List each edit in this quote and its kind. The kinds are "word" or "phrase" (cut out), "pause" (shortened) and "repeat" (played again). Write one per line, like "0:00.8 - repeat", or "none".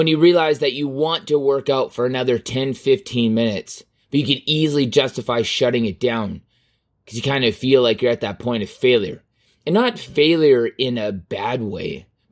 none

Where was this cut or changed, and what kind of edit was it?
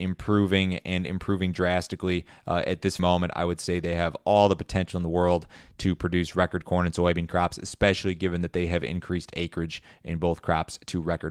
0:03.0 - word

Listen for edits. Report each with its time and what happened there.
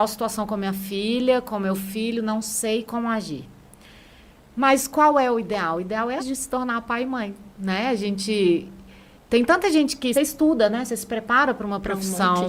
0:06.2 - word
0:07.5 - pause
0:09.1 - pause
0:10.1 - phrase

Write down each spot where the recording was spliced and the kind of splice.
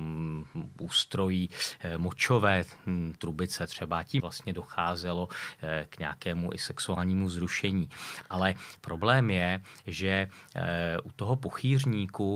0:04.2 - phrase

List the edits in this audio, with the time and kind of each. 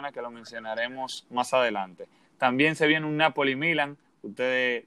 none

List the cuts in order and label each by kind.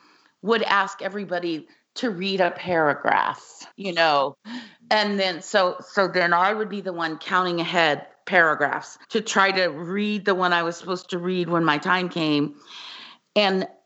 0:03.7 - pause
0:09.0 - pause

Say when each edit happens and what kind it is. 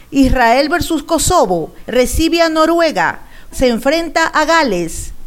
0:01.8 - word
0:03.5 - word

